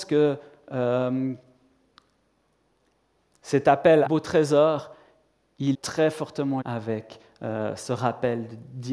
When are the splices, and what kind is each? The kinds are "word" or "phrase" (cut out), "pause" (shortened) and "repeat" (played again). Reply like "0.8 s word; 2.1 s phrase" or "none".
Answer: 4.1 s phrase; 5.7 s word; 6.6 s word